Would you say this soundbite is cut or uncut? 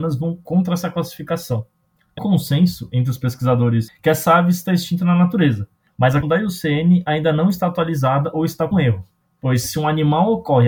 cut